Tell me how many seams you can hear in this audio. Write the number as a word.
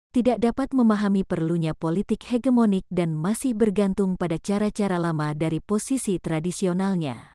zero